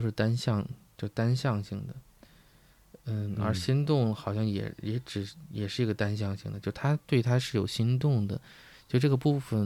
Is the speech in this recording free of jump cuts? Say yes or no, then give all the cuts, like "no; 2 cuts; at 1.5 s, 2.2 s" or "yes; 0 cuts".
yes; 0 cuts